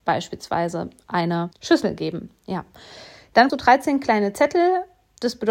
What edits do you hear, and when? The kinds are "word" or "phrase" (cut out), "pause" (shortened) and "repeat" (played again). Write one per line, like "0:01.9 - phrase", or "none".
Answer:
0:01.5 - word
0:03.5 - word